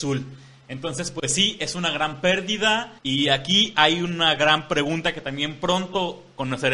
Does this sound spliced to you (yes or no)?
yes